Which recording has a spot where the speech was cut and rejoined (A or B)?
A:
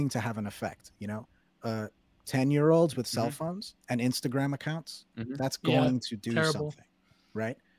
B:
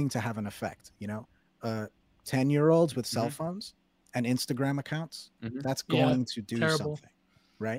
A